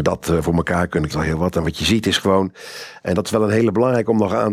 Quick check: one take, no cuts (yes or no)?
no